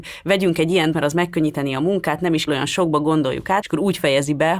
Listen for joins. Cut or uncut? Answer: cut